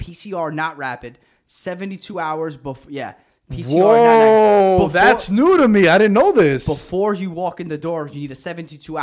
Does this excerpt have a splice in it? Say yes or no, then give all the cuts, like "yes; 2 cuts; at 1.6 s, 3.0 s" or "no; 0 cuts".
no; 0 cuts